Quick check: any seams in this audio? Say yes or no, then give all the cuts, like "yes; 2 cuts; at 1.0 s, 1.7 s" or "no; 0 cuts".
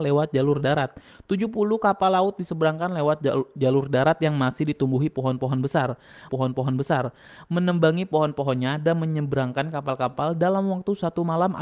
yes; 1 cut; at 6.3 s